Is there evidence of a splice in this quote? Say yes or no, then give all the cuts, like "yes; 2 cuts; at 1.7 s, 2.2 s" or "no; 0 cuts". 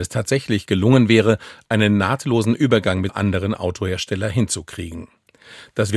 yes; 1 cut; at 3.1 s